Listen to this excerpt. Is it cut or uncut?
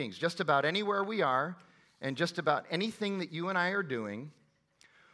uncut